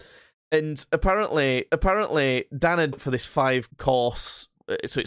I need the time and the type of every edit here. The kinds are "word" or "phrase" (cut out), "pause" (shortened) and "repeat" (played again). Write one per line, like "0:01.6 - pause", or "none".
0:01.7 - repeat
0:02.9 - word
0:03.7 - word